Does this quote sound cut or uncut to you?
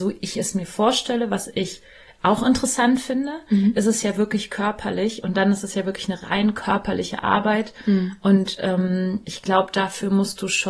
uncut